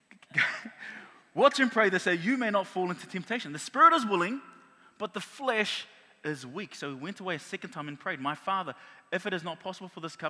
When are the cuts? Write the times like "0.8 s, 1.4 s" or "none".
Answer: none